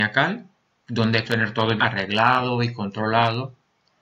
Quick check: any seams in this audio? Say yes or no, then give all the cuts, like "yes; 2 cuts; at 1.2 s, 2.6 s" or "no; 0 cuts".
yes; 2 cuts; at 1.2 s, 1.8 s